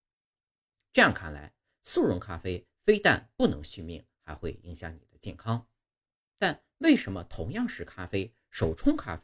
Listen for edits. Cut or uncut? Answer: uncut